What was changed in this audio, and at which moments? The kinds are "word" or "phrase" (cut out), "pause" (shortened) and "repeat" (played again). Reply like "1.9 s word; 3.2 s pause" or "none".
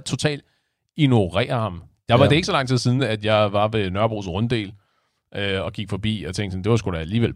none

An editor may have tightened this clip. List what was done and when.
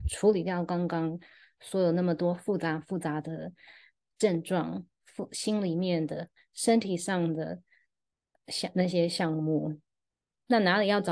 none

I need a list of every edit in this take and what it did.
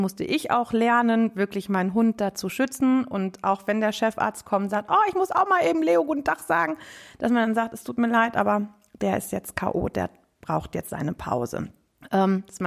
none

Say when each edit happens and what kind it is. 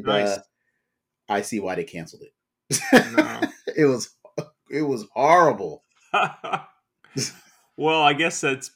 none

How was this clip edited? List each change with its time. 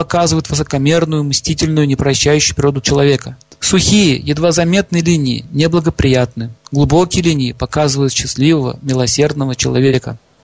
none

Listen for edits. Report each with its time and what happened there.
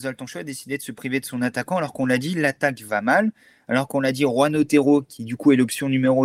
none

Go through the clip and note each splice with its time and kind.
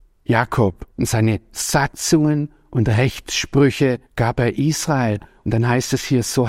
0.9 s pause; 4.1 s pause

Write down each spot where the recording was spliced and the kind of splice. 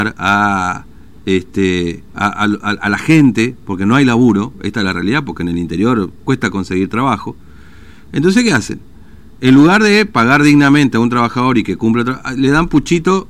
2.1 s pause; 6.2 s pause

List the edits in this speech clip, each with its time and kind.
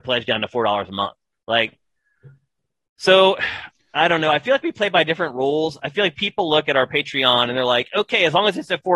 none

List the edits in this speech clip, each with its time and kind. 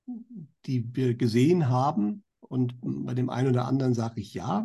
2.3 s pause

